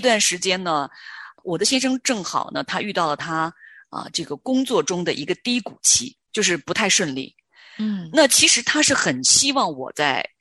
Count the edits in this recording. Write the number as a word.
one